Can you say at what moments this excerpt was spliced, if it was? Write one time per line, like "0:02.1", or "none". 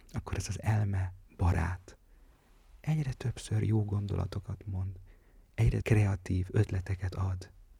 0:01.3
0:05.8